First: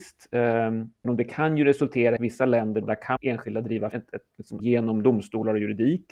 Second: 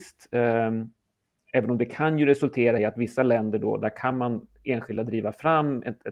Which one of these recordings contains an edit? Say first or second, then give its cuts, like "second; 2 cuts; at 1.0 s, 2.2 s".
first; 6 cuts; at 1.0 s, 2.2 s, 2.8 s, 3.2 s, 3.9 s, 4.6 s